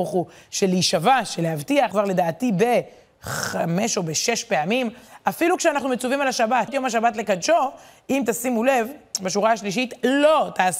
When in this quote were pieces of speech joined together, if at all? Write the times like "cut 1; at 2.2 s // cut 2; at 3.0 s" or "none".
cut 1; at 1.9 s // cut 2; at 6.7 s